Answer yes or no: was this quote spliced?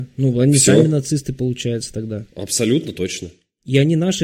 no